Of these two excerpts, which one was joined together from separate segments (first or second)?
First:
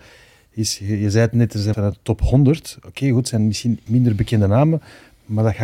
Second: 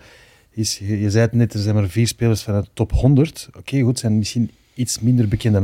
first